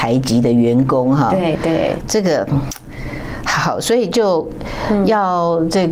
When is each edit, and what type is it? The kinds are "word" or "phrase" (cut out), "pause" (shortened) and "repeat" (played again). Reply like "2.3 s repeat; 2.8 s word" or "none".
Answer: 2.0 s word